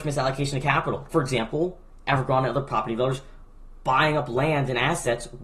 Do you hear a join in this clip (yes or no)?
yes